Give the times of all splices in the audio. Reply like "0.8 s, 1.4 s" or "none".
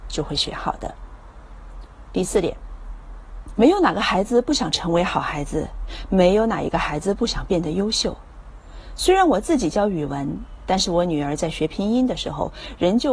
3.6 s